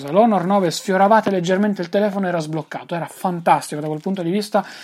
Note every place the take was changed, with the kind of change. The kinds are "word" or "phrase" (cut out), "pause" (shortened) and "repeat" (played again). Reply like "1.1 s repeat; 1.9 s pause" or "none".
none